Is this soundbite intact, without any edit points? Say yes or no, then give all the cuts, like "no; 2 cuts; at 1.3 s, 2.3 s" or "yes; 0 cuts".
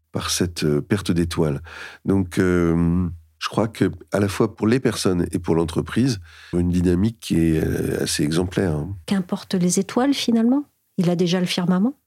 no; 2 cuts; at 6.5 s, 9.0 s